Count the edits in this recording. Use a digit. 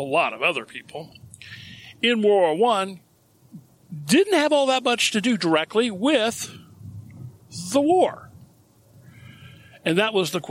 0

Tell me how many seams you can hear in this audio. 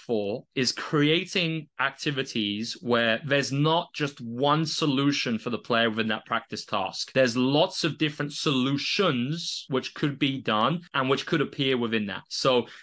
0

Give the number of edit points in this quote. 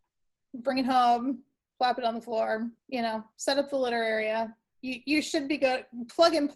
1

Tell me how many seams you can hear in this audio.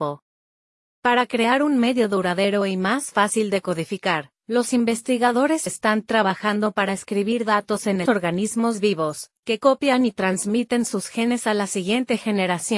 2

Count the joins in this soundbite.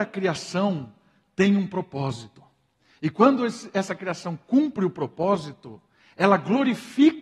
0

